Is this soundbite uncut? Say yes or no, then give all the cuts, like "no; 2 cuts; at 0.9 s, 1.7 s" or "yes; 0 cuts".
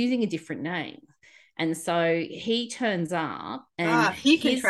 yes; 0 cuts